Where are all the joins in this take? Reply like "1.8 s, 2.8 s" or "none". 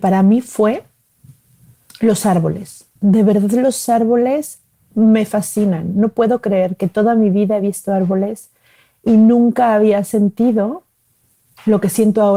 3.0 s